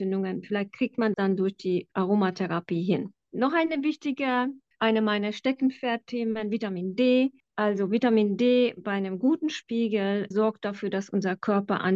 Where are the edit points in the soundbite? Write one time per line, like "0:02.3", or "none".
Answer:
0:01.1
0:04.7
0:08.8
0:10.3

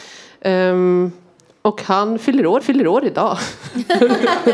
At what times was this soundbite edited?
0:02.6

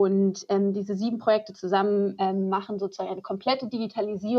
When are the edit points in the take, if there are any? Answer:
none

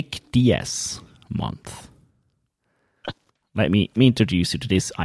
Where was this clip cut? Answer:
0:04.0

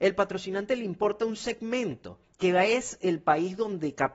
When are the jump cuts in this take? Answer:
none

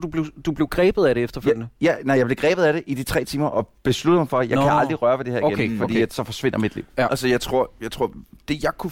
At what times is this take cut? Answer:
none

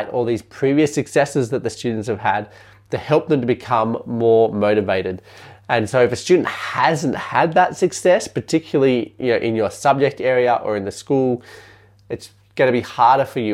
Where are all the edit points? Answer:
none

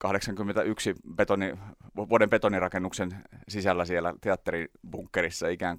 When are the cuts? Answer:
none

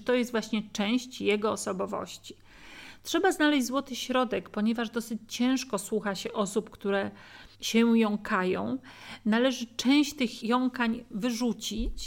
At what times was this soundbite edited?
0:07.5

